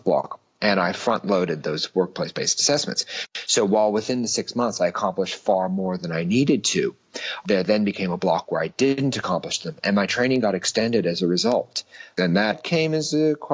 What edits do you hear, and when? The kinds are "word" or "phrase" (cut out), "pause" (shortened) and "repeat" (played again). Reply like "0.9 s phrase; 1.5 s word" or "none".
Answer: none